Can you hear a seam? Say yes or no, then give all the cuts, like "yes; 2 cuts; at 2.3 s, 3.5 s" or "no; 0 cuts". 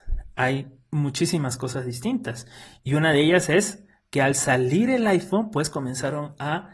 no; 0 cuts